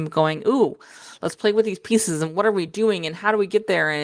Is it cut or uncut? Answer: uncut